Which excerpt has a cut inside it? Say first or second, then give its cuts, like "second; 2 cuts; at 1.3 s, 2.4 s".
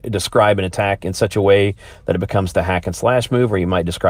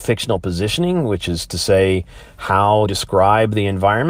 second; 1 cut; at 2.9 s